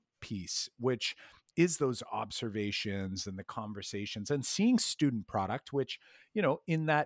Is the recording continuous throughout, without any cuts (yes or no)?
yes